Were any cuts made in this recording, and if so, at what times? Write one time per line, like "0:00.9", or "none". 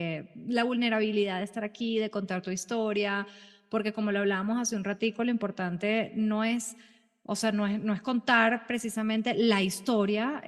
none